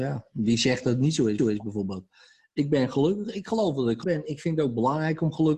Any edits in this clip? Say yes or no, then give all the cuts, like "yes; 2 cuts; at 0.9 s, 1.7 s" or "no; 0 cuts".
yes; 2 cuts; at 1.4 s, 4.0 s